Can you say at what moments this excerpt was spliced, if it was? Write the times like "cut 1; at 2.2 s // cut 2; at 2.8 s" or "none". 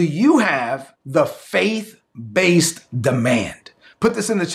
cut 1; at 0.9 s

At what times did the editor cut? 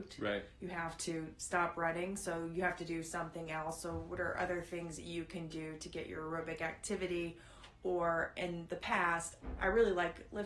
none

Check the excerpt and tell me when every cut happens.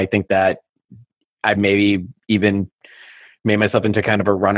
cut 1; at 1.6 s

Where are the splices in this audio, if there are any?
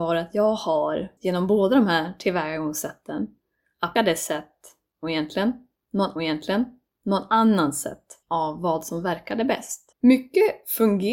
cut 1; at 1.2 s // cut 2; at 4.0 s // cut 3; at 6.2 s // cut 4; at 8.2 s // cut 5; at 9.9 s

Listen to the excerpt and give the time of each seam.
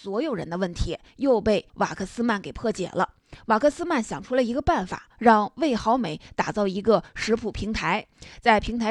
cut 1; at 1.7 s

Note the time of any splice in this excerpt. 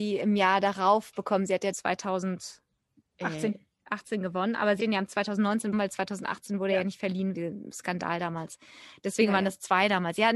cut 1; at 1.7 s // cut 2; at 3.0 s // cut 3; at 4.8 s // cut 4; at 5.7 s // cut 5; at 7.3 s

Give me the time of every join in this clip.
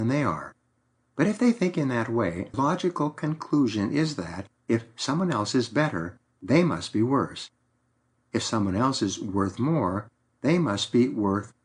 cut 1; at 2.5 s

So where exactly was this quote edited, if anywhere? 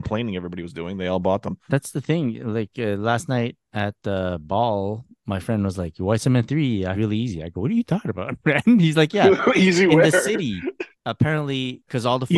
cut 1; at 1.6 s // cut 2; at 6.9 s // cut 3; at 10.9 s

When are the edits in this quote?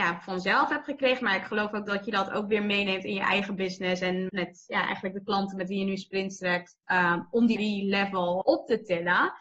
cut 1; at 4.3 s // cut 2; at 6.8 s // cut 3; at 7.6 s // cut 4; at 8.4 s

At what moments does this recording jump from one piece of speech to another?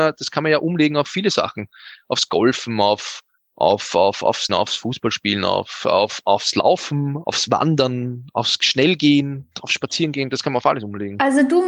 cut 1; at 3.4 s // cut 2; at 4.5 s // cut 3; at 7.2 s

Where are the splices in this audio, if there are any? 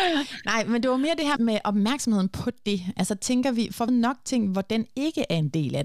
cut 1; at 1.4 s // cut 2; at 3.9 s

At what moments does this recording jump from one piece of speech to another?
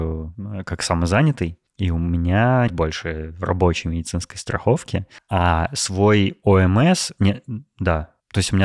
cut 1; at 2.7 s

